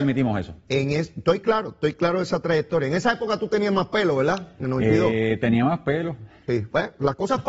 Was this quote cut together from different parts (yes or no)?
no